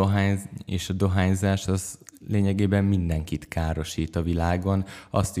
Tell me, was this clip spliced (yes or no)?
no